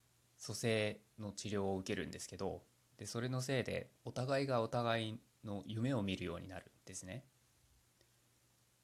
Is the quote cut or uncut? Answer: cut